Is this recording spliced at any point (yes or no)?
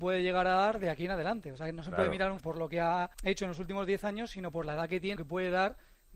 yes